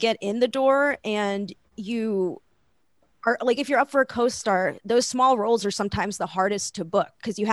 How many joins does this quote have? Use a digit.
1